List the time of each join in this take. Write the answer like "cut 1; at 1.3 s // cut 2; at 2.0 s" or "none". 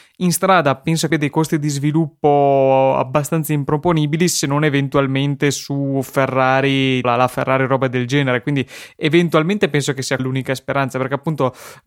cut 1; at 1.1 s // cut 2; at 7.0 s // cut 3; at 10.2 s